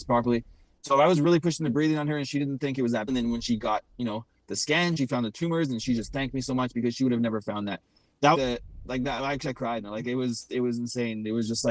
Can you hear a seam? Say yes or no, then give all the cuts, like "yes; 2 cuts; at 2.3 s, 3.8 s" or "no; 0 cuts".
yes; 2 cuts; at 3.1 s, 8.3 s